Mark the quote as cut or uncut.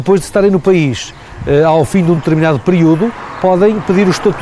uncut